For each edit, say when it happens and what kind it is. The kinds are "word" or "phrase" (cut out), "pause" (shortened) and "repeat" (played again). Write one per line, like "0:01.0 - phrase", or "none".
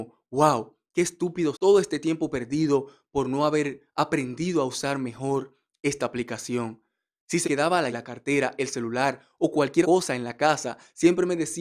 0:01.5 - word
0:07.4 - word
0:07.9 - word
0:09.8 - word

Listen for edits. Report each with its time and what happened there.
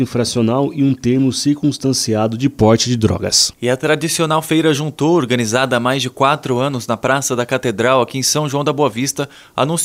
none

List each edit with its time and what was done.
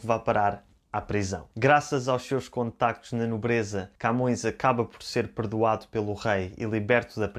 0:01.5 - pause
0:04.0 - pause

